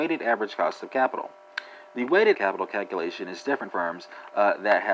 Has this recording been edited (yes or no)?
yes